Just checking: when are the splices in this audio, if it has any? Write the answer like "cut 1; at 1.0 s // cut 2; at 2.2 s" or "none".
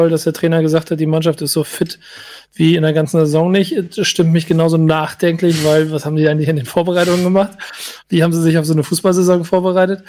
none